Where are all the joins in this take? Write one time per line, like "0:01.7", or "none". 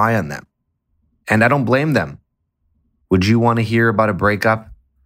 none